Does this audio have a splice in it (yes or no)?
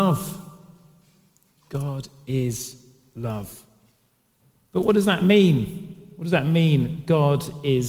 no